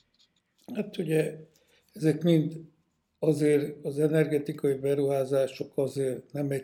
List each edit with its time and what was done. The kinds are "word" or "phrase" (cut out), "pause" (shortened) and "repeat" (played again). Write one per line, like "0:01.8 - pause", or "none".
none